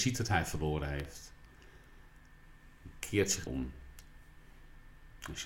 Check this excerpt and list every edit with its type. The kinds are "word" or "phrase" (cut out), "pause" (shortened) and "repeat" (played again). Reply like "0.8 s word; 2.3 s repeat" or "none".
3.5 s phrase